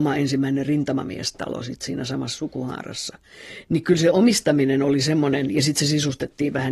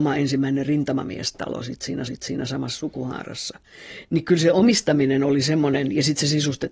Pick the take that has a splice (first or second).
second